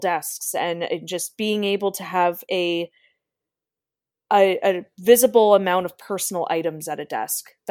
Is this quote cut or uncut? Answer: uncut